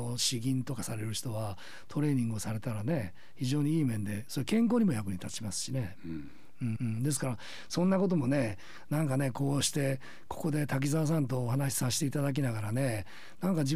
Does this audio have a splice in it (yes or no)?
yes